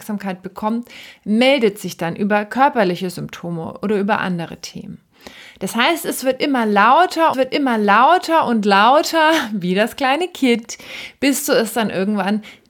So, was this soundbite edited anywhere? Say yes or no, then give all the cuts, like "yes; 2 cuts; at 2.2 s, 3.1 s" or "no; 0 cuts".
yes; 1 cut; at 7.3 s